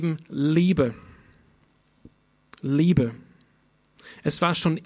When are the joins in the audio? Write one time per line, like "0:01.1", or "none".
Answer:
none